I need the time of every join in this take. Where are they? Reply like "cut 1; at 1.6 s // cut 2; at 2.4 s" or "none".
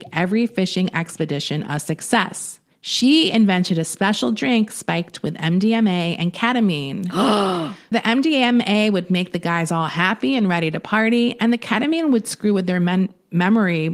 cut 1; at 2.7 s // cut 2; at 7.9 s

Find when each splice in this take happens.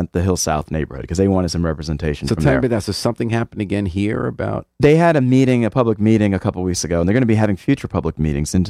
none

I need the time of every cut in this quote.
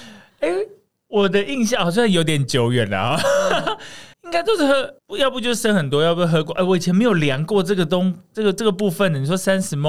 cut 1; at 4.1 s // cut 2; at 5.0 s

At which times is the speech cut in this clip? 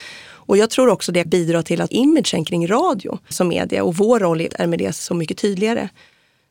cut 1; at 1.2 s // cut 2; at 1.9 s // cut 3; at 3.3 s // cut 4; at 4.5 s

